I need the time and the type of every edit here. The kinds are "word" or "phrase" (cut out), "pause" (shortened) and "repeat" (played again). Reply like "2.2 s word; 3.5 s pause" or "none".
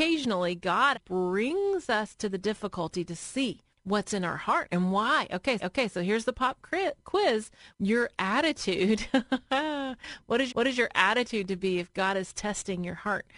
0.9 s word; 3.7 s pause; 5.6 s repeat; 7.7 s phrase; 10.5 s repeat